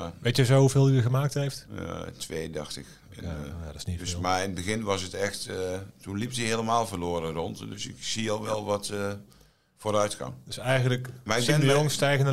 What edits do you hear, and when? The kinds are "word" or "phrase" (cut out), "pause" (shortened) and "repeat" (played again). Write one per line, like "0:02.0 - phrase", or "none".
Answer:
none